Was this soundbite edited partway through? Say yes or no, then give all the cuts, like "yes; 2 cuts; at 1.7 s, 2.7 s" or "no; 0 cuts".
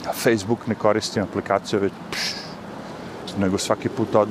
no; 0 cuts